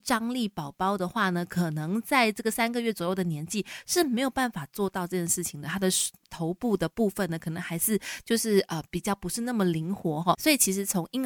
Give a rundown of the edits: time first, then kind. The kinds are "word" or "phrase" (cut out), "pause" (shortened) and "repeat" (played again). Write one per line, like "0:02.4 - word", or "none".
0:10.3 - word